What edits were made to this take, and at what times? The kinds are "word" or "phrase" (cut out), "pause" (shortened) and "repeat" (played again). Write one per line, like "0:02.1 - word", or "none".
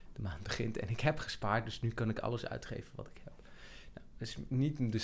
none